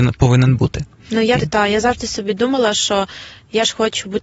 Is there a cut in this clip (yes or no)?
yes